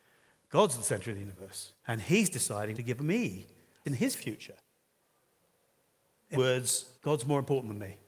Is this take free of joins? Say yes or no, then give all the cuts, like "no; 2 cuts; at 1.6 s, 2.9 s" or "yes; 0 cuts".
no; 5 cuts; at 1.8 s, 2.7 s, 3.8 s, 6.3 s, 7.0 s